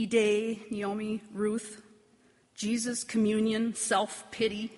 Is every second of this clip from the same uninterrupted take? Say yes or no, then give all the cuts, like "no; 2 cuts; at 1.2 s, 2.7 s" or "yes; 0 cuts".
yes; 0 cuts